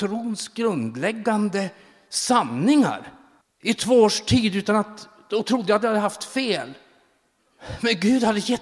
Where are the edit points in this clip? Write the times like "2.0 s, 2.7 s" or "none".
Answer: 3.4 s